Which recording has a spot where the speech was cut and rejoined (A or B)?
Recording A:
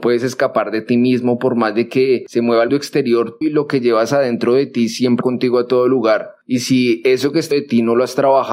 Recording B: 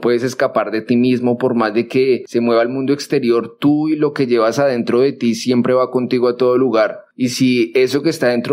A